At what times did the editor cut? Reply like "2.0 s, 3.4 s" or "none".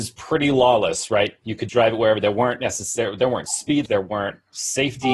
1.7 s, 3.9 s